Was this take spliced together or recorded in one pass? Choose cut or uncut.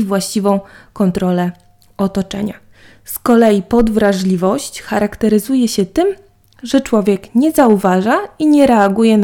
uncut